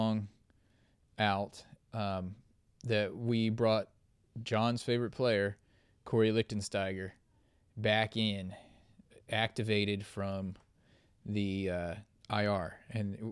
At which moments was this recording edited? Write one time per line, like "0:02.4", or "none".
none